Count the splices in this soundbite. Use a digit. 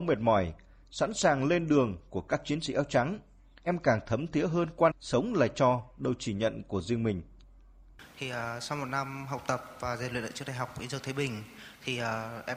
1